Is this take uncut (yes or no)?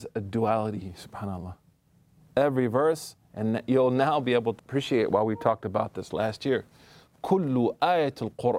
no